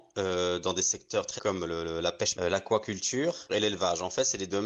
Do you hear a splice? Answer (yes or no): yes